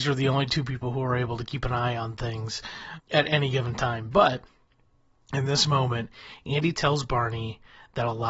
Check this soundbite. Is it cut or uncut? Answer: cut